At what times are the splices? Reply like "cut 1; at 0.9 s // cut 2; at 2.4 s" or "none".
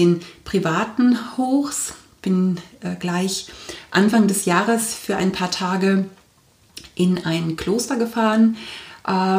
none